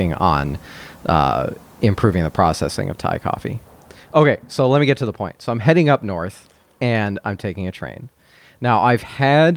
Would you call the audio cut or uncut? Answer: uncut